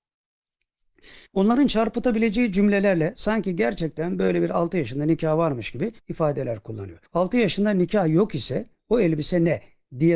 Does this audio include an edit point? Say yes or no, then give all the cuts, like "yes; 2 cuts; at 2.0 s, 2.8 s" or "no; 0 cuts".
yes; 3 cuts; at 1.3 s, 6.0 s, 7.1 s